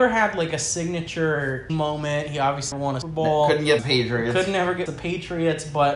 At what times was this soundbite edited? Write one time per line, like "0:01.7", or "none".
0:01.7
0:02.7
0:03.0
0:03.8
0:04.9